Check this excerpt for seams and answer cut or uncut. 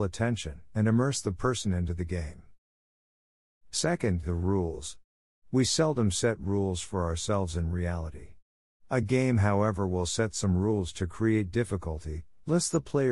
uncut